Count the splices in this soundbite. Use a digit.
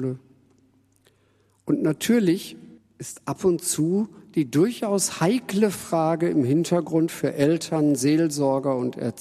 1